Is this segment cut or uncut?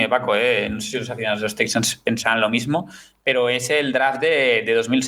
uncut